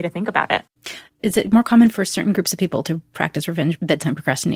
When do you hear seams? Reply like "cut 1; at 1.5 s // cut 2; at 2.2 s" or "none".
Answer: none